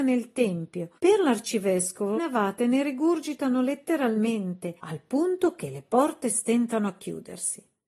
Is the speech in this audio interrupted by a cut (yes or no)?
yes